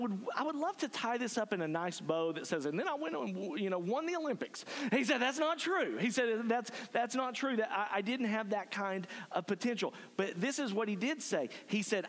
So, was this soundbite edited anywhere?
no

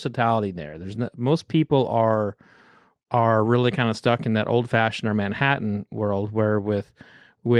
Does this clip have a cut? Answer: no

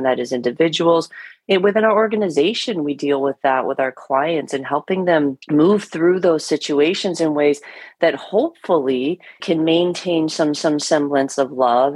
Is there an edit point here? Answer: yes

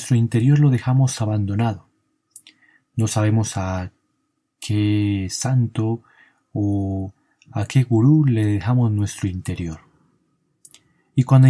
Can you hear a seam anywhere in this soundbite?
no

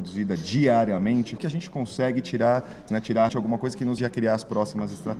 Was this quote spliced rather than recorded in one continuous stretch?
yes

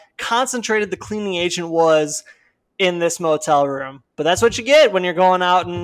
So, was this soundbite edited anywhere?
no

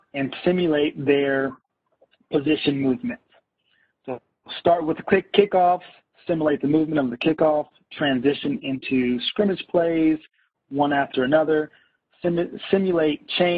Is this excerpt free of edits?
yes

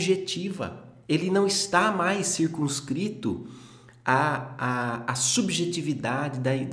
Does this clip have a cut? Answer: yes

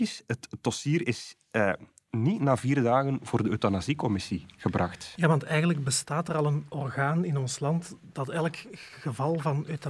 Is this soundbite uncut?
yes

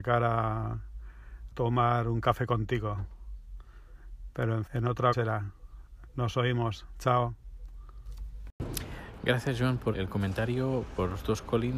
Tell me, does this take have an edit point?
yes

